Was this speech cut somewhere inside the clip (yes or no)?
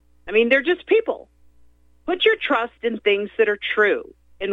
no